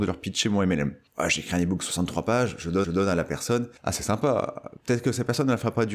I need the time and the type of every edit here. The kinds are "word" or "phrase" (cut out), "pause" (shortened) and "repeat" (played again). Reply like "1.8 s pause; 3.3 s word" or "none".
1.1 s pause; 2.8 s repeat; 3.8 s pause